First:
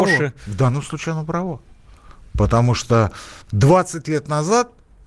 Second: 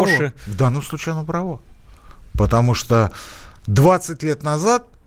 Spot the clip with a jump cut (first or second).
first